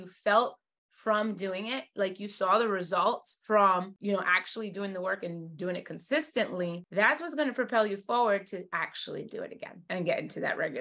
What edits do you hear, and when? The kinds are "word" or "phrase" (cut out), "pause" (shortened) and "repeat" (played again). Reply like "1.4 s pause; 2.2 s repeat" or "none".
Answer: none